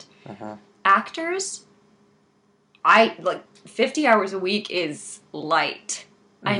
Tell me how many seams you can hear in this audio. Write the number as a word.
zero